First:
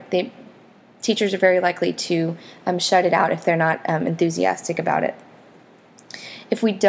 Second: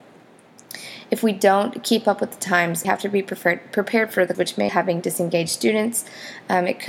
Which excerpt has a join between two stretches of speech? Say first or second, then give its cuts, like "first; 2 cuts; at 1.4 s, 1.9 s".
second; 3 cuts; at 2.8 s, 4.3 s, 4.7 s